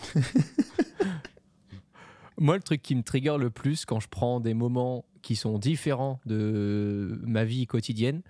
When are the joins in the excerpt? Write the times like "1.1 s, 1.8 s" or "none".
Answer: none